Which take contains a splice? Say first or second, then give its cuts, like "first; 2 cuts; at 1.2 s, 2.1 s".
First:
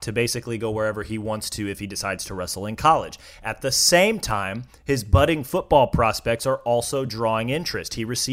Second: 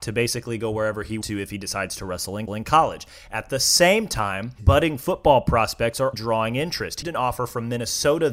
second; 5 cuts; at 1.2 s, 2.5 s, 4.6 s, 6.1 s, 7.0 s